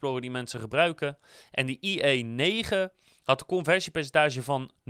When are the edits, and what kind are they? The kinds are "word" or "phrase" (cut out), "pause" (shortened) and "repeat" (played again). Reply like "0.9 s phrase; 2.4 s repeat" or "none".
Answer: none